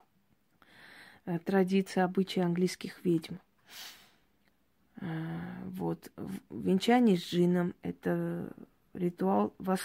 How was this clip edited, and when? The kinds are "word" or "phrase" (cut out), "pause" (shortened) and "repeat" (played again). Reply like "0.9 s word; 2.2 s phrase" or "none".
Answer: none